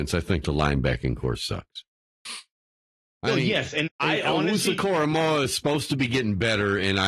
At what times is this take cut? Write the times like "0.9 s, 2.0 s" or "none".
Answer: 3.9 s